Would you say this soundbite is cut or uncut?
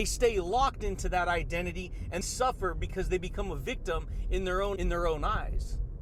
cut